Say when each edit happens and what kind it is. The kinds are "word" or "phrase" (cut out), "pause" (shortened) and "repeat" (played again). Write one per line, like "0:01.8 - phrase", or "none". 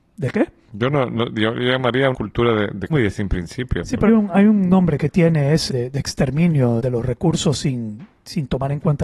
0:02.1 - word
0:02.9 - word
0:04.1 - word
0:05.7 - word
0:06.8 - word